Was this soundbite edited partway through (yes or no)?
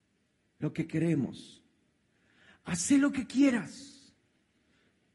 no